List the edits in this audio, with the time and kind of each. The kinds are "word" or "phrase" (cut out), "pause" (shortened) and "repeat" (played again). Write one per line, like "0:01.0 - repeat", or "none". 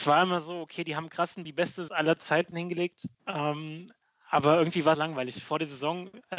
0:01.4 - phrase
0:01.9 - word
0:03.1 - pause
0:04.9 - phrase